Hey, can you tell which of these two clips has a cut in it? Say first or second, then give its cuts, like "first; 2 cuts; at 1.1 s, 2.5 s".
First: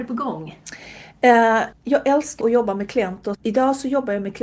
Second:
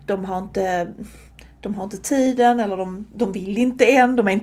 first; 3 cuts; at 1.7 s, 2.4 s, 3.3 s